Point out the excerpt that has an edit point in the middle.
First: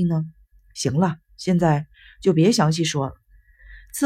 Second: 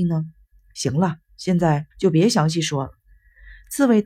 second; 1 cut; at 1.9 s

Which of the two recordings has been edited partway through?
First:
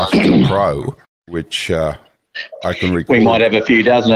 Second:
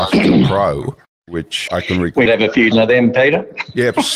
second; 3 cuts; at 1.7 s, 2.3 s, 2.7 s

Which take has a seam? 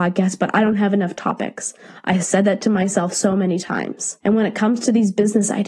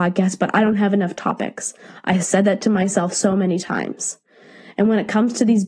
first; 1 cut; at 4.2 s

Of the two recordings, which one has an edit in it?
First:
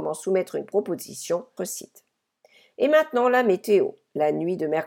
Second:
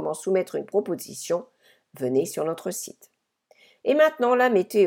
first; 1 cut; at 1.6 s

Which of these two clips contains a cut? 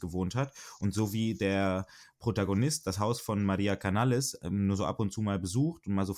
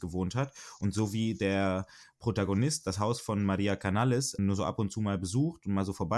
second; 1 cut; at 4.4 s

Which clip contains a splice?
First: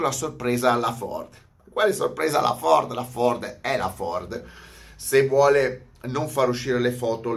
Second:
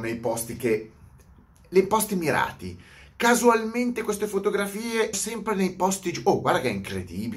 second; 1 cut; at 5.1 s

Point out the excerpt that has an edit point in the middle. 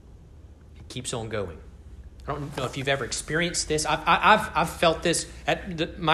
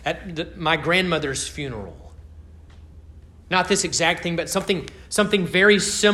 first; 1 cut; at 2.2 s

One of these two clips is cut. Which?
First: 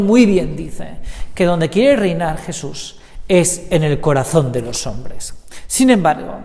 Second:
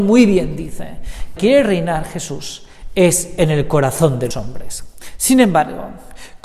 second; 2 cuts; at 1.4 s, 4.3 s

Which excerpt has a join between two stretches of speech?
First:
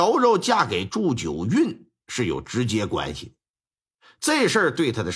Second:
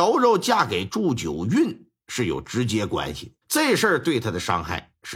second; 1 cut; at 3.4 s

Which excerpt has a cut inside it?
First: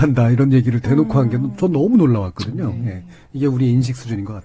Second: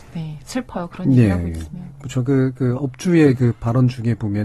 second; 1 cut; at 2.7 s

